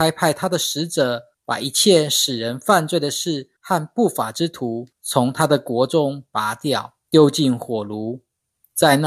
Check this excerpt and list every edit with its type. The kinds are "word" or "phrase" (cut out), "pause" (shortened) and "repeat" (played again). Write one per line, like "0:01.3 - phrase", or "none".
0:01.3 - pause
0:03.6 - pause
0:04.9 - pause
0:07.0 - pause